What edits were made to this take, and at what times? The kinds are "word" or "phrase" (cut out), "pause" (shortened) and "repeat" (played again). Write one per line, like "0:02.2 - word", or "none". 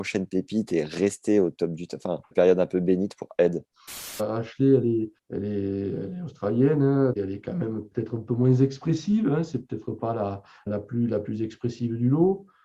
0:02.3 - phrase
0:05.2 - pause
0:07.1 - word
0:10.7 - word